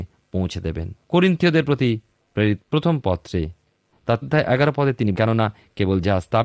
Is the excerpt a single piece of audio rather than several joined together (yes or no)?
no